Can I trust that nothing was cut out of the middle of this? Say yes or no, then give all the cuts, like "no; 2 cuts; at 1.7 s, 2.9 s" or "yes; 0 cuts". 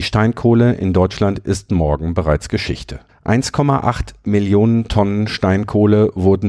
no; 1 cut; at 3.1 s